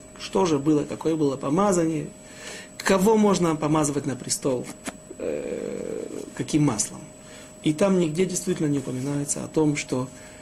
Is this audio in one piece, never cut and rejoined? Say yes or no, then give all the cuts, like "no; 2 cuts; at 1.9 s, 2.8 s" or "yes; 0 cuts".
yes; 0 cuts